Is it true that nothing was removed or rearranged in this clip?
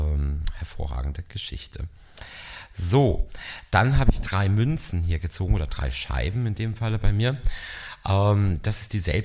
yes; 0 cuts

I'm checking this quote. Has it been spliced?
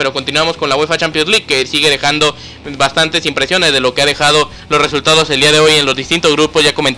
no; 0 cuts

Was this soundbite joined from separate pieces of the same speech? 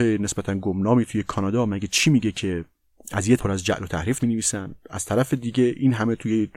yes; 2 cuts; at 3.4 s, 4.2 s

